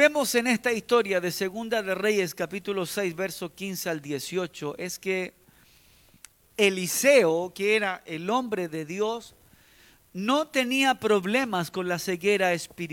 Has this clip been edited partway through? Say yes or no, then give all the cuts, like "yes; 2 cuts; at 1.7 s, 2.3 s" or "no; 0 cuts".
no; 0 cuts